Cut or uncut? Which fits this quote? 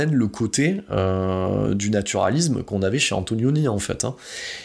uncut